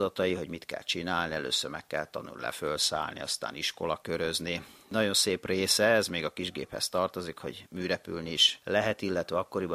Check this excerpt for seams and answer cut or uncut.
uncut